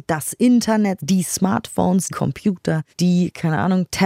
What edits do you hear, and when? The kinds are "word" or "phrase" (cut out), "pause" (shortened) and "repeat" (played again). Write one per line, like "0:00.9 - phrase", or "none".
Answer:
0:01.0 - phrase
0:02.1 - word
0:02.9 - pause